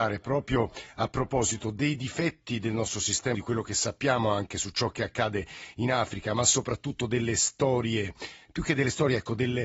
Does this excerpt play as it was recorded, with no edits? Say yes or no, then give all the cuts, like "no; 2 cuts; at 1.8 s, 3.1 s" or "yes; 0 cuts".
no; 1 cut; at 3.3 s